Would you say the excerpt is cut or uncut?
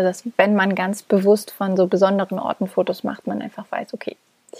uncut